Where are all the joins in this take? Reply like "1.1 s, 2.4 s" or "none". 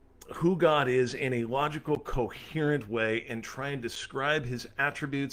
none

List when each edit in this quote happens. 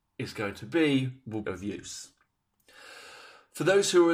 1.4 s

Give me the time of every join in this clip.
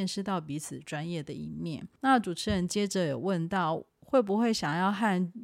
2.0 s, 3.9 s

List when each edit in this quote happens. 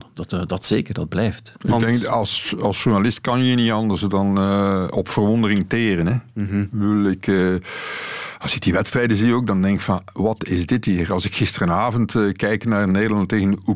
1.6 s

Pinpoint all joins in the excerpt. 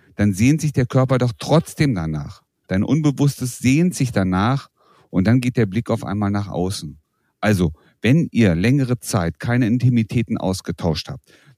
none

